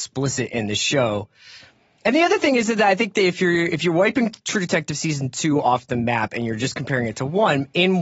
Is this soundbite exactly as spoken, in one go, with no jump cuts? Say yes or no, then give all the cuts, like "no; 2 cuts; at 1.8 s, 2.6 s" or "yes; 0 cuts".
yes; 0 cuts